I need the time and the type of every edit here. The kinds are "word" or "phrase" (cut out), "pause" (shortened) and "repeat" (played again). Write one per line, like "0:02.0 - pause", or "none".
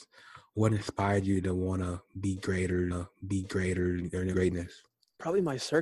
0:02.9 - repeat
0:04.3 - phrase